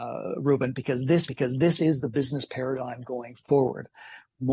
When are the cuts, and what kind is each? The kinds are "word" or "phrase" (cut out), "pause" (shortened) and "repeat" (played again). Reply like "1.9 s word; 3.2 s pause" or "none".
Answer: 1.3 s repeat